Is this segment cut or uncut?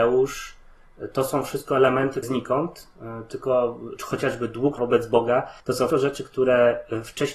cut